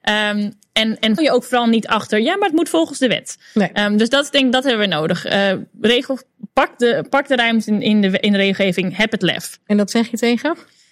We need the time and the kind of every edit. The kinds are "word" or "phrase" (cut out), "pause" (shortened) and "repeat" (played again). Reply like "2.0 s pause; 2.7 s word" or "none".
1.2 s phrase